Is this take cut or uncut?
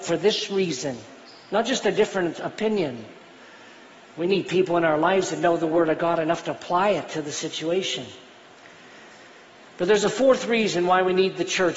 uncut